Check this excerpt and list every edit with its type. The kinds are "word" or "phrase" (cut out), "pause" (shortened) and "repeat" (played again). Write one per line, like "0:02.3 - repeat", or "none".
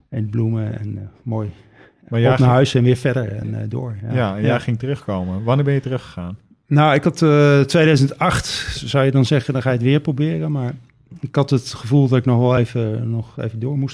none